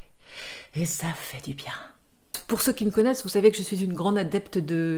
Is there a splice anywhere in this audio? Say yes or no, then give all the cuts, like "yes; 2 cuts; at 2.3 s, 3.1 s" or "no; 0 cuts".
no; 0 cuts